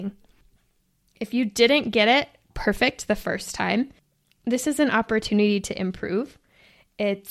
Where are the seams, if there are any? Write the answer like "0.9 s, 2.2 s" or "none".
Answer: none